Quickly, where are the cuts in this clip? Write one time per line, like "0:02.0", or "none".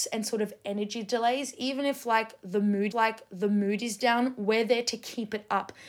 0:02.9